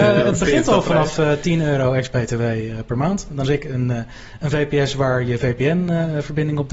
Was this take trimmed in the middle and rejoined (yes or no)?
yes